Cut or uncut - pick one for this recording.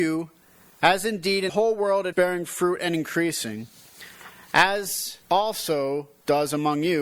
cut